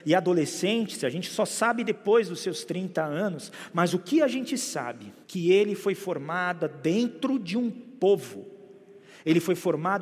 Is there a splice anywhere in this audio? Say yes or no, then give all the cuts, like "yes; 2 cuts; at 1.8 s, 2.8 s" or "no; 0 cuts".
yes; 1 cut; at 5.2 s